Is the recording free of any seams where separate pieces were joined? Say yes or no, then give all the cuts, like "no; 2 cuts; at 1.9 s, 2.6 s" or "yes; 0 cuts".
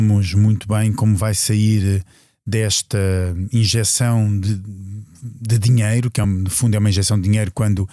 yes; 0 cuts